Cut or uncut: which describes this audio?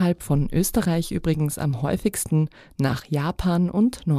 uncut